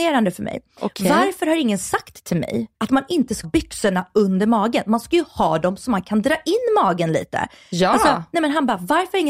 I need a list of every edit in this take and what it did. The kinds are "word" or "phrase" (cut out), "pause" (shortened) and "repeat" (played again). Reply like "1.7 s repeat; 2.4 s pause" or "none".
2.7 s pause; 3.4 s word